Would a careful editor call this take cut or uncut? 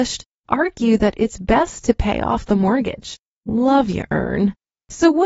uncut